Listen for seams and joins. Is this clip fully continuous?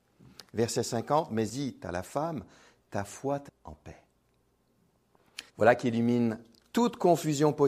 no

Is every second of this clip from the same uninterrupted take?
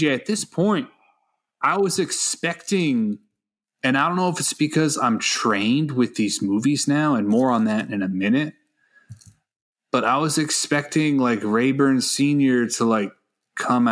yes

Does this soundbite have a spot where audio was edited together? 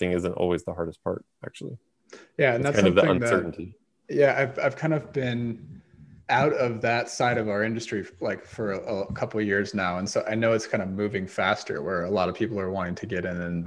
no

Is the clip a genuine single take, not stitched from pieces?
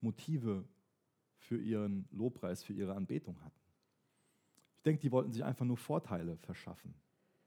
yes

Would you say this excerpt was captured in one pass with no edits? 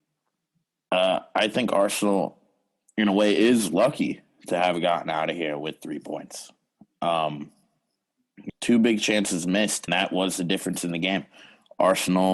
no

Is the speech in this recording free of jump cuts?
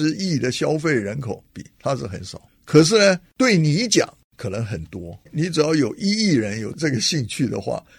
no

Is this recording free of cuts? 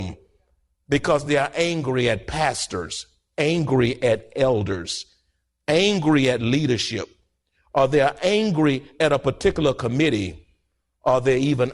yes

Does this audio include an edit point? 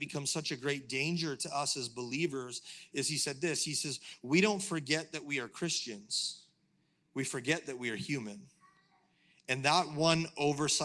no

